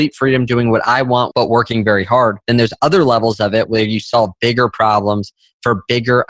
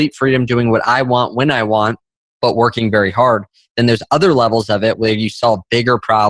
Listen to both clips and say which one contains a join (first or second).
first